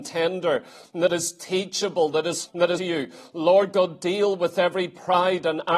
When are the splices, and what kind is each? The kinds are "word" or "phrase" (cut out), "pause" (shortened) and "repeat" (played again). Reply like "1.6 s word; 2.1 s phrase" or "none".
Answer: 2.5 s word; 2.8 s phrase

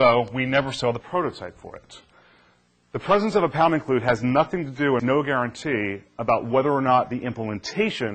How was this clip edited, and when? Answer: 5.0 s word

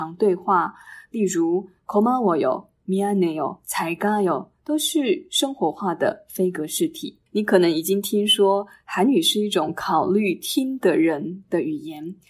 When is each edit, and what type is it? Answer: 7.3 s pause

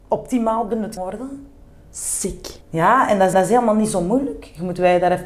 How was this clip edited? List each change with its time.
1.0 s word; 2.6 s pause; 3.3 s repeat

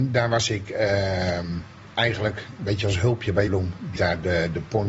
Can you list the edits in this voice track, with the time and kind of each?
2.6 s word; 3.5 s word; 3.9 s word

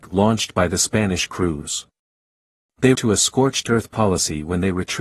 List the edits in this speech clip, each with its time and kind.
2.9 s word

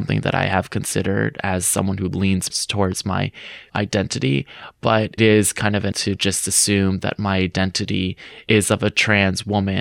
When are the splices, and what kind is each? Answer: 2.5 s word; 3.7 s word; 5.2 s word; 5.9 s word

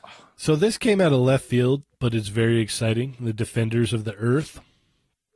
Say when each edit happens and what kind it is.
none

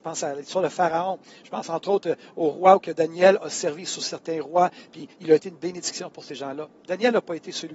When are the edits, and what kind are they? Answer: none

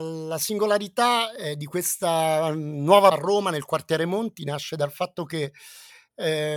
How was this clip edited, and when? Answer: 3.1 s word

